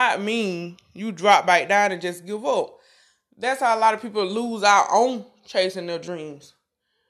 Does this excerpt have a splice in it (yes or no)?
no